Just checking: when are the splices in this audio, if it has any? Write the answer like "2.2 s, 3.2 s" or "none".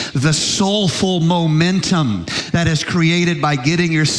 none